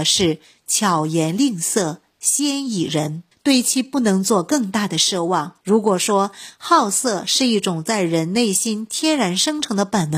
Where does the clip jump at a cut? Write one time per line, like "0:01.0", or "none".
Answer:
0:03.3
0:05.6